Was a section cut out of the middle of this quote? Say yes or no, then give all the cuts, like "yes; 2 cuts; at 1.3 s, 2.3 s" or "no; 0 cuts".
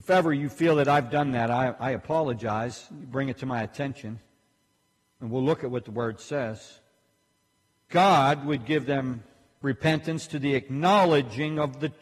yes; 1 cut; at 7.9 s